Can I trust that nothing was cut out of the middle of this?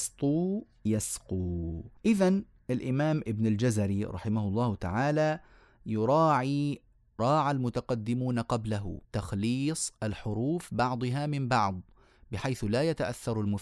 no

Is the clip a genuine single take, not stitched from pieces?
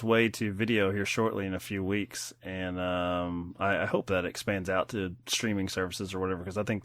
yes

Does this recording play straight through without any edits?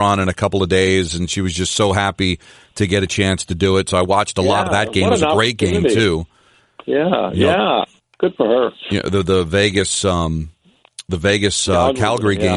yes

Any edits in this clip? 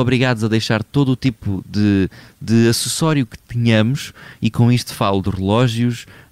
no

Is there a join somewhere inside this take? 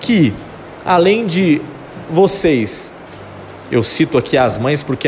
no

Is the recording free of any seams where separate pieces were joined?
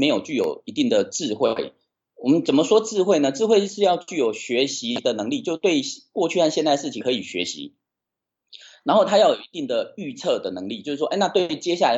yes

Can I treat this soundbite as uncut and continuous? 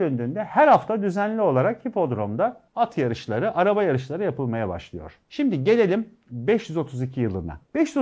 no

